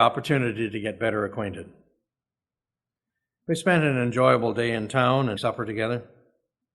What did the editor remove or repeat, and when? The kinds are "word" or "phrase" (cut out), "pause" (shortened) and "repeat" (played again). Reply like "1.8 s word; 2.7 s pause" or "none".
5.4 s word